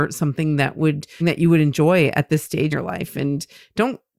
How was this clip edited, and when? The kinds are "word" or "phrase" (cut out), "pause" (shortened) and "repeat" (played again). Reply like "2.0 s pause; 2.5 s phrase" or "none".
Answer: 1.2 s phrase; 2.7 s word